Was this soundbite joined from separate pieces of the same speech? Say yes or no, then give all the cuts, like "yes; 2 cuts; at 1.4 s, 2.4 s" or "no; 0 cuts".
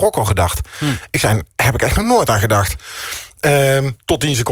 no; 0 cuts